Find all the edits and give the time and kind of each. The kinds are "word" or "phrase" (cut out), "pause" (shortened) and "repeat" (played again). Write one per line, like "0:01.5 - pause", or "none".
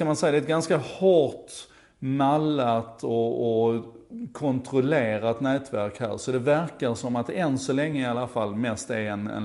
none